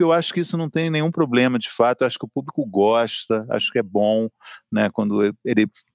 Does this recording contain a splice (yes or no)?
no